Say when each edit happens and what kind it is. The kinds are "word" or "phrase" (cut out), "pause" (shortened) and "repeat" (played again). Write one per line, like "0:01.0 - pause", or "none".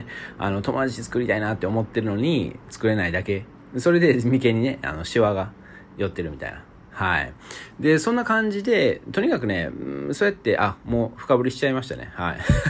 none